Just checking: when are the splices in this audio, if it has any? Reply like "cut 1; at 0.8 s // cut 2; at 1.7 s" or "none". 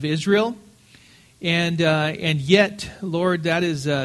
none